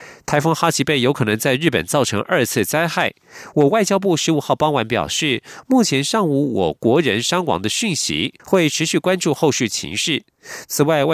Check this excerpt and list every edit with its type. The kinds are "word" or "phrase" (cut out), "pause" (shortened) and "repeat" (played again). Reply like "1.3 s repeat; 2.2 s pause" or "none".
8.4 s pause